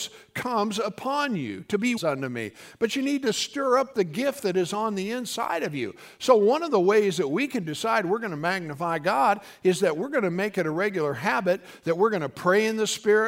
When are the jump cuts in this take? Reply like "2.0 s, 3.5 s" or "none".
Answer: 2.0 s